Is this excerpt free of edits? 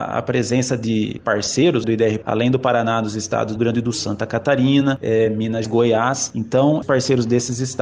no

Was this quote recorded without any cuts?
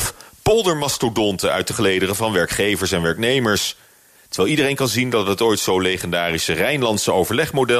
yes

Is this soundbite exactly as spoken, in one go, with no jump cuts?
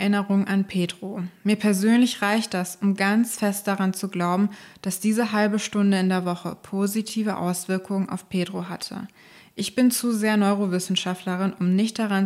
yes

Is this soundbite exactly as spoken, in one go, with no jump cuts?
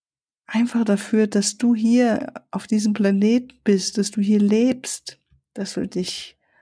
yes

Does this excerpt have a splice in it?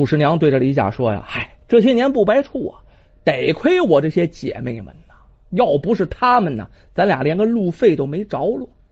yes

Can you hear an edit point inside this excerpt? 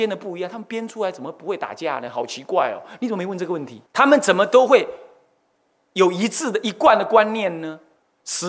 yes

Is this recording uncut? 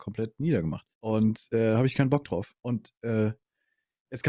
no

